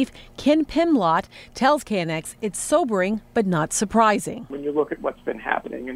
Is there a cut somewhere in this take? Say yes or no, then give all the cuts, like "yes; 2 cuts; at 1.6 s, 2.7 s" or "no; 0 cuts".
no; 0 cuts